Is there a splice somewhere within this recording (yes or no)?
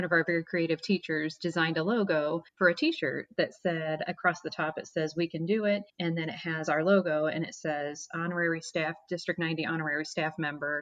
yes